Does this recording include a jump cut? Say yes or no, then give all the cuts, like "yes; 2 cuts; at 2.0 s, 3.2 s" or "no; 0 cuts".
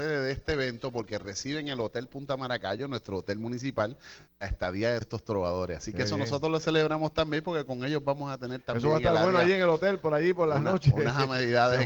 yes; 1 cut; at 5.0 s